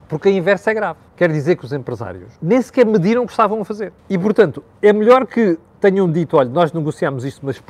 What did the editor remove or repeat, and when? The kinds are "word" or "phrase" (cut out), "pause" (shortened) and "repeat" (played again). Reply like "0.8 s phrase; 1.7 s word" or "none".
1.1 s pause; 2.4 s pause; 4.0 s pause; 4.7 s pause